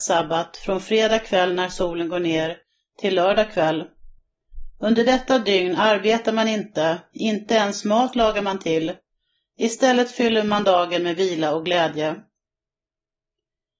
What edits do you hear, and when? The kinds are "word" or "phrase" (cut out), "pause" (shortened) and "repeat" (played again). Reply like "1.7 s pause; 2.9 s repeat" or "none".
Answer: none